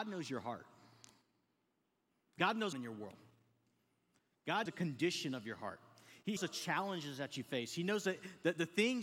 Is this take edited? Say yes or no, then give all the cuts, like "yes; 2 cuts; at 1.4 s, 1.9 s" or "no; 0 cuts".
yes; 3 cuts; at 2.7 s, 4.7 s, 6.4 s